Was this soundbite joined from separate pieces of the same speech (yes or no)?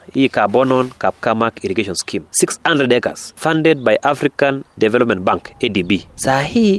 no